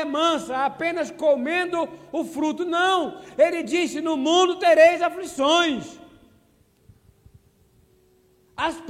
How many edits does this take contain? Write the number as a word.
zero